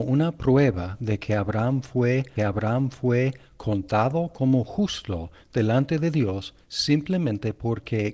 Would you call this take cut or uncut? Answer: cut